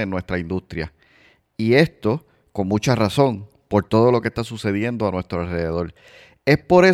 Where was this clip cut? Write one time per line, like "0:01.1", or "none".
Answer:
none